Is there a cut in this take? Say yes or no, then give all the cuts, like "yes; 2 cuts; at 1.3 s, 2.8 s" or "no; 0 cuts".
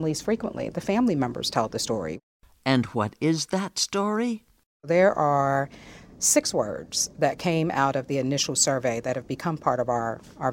no; 0 cuts